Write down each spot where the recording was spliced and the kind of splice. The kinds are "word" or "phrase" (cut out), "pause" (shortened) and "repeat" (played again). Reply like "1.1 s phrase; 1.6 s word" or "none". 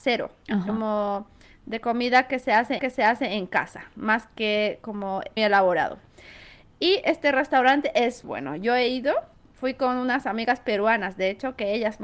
2.8 s repeat; 5.4 s word; 8.2 s word